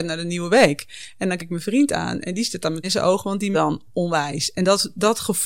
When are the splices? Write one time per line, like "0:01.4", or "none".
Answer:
0:01.4
0:02.8
0:03.5

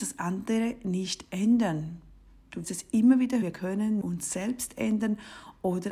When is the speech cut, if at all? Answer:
0:02.6
0:03.4
0:04.0

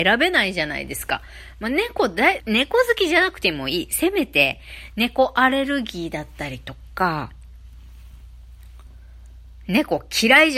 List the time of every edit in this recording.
0:02.4

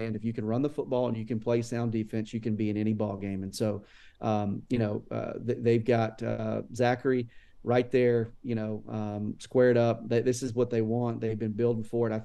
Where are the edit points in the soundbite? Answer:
none

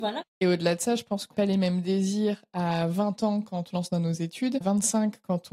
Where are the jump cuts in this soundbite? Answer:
0:01.3
0:03.7
0:04.6

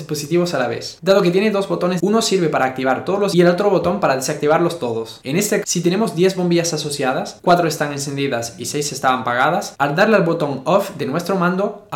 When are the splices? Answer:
0:02.0
0:03.3
0:05.6

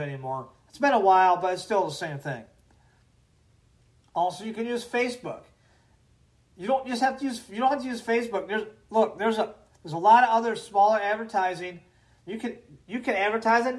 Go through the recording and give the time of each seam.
none

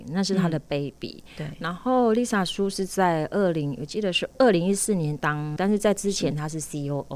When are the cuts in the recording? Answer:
0:05.6

